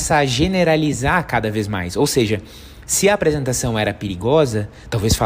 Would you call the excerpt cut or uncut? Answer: uncut